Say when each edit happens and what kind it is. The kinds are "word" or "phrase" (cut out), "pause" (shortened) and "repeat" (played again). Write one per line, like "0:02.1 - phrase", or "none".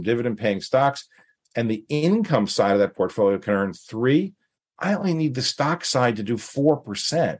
none

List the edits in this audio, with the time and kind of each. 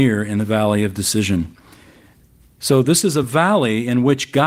none

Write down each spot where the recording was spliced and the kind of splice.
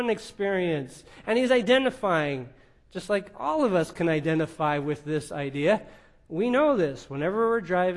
none

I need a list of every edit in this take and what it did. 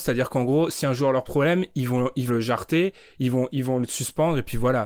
0:01.3 - word
0:02.3 - word

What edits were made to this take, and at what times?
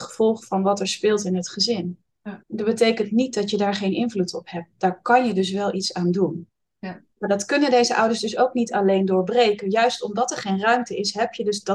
0:02.4 - pause

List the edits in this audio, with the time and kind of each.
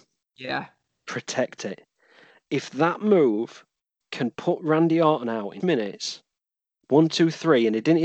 0:05.6 - word

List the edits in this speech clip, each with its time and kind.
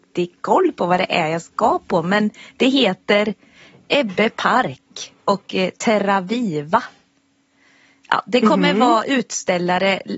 none

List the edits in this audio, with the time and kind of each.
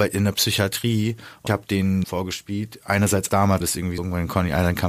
0:01.5 - word
0:02.0 - phrase
0:03.3 - word
0:03.6 - word
0:04.0 - word

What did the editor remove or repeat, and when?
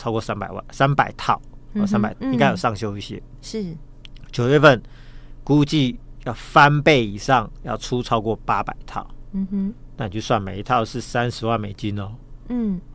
0:02.1 - word

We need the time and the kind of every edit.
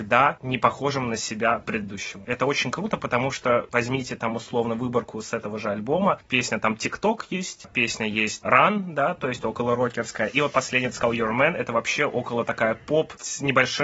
0:08.4 - word

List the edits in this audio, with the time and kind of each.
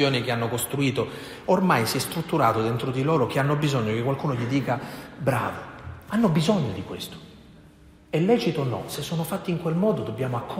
none

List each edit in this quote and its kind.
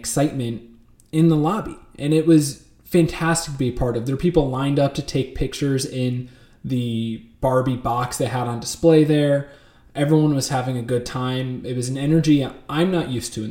none

